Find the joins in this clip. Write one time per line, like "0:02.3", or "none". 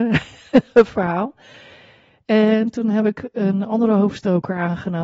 none